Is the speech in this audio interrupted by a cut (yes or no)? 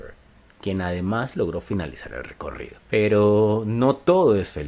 yes